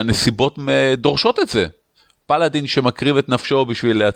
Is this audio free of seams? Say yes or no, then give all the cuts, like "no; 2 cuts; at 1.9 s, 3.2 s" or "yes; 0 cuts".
yes; 0 cuts